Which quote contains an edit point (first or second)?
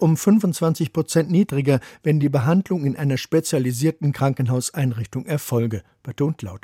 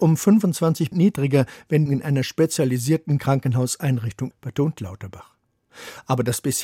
second